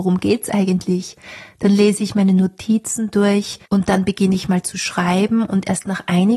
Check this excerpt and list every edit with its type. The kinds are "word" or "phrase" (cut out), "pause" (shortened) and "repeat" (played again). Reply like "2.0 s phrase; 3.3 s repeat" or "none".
3.7 s pause